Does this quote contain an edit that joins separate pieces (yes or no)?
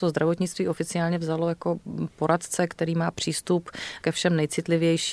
no